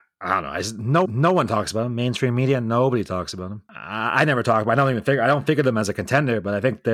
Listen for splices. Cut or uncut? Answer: cut